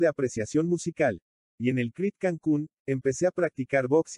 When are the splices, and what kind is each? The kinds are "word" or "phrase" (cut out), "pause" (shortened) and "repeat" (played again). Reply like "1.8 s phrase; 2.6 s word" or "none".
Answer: none